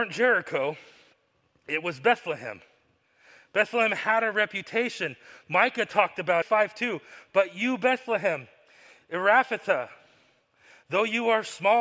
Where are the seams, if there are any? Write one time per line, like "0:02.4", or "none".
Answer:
0:06.4